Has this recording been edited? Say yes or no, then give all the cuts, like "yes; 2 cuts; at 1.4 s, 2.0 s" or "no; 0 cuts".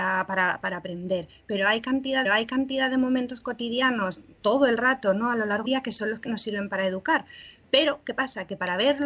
yes; 3 cuts; at 2.3 s, 5.7 s, 6.3 s